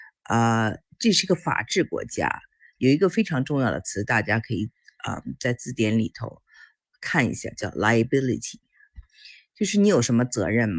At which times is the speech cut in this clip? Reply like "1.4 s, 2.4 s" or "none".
none